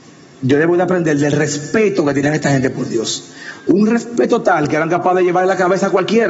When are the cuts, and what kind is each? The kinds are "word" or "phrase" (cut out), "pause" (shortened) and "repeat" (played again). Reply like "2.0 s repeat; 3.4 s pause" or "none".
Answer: none